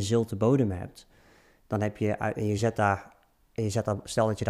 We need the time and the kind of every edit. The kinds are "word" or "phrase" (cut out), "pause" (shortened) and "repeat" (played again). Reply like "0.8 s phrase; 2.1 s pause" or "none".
none